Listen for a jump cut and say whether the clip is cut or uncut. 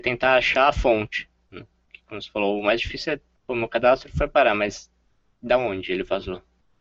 uncut